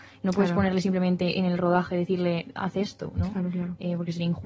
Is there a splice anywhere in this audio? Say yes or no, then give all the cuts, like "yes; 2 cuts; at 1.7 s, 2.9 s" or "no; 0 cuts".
no; 0 cuts